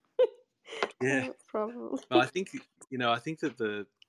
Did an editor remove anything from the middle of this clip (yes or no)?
no